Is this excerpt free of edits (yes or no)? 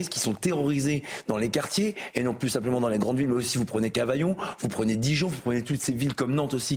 yes